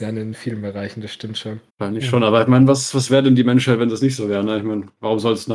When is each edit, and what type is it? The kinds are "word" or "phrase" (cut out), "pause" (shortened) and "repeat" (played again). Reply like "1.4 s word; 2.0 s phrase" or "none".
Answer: 1.7 s pause

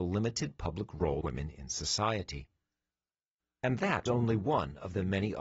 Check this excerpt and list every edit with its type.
1.2 s word; 4.1 s word

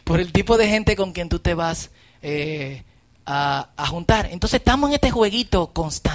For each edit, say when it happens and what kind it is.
none

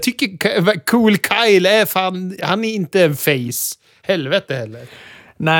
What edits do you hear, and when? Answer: none

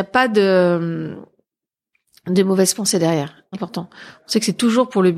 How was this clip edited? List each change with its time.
3.5 s phrase

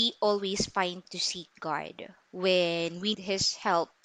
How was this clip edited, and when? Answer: 1.0 s word; 3.1 s word

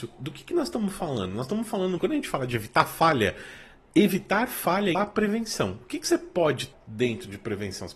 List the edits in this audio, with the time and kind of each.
2.0 s word; 4.9 s word; 6.7 s word

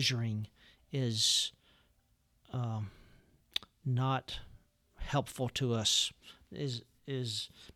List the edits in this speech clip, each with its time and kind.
none

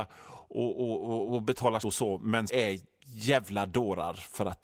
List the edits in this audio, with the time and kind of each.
1.3 s word; 1.8 s word; 2.5 s word

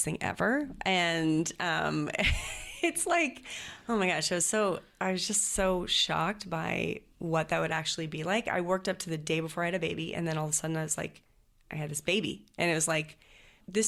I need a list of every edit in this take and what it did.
none

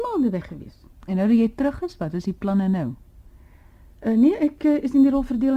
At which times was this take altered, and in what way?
0.9 s pause

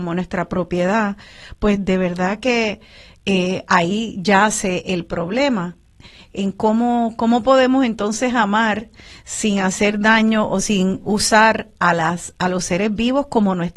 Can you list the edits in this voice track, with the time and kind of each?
none

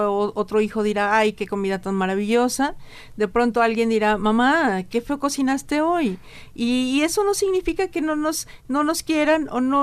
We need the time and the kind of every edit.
none

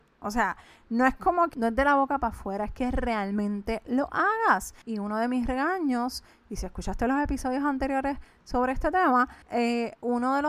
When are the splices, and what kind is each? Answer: 4.8 s pause; 9.4 s pause

